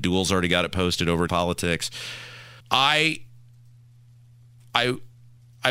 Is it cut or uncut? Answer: cut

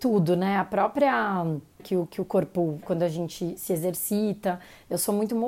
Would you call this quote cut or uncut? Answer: cut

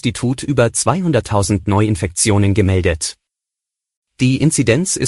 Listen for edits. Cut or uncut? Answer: uncut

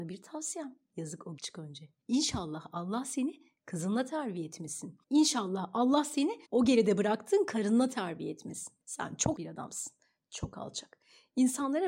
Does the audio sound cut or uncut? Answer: cut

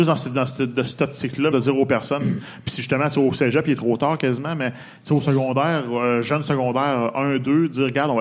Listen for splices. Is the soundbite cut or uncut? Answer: cut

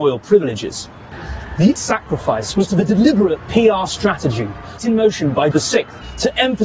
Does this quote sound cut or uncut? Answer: cut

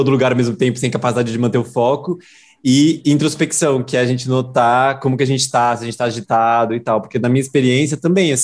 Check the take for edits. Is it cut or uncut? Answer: uncut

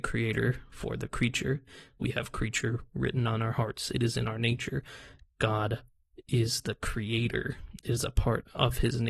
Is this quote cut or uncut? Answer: uncut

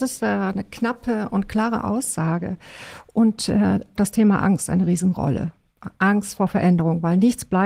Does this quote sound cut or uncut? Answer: cut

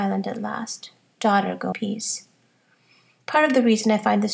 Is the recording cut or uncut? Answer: cut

